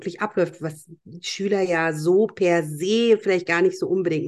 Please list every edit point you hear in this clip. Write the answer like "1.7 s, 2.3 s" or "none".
none